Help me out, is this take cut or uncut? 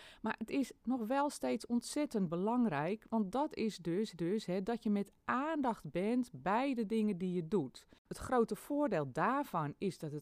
cut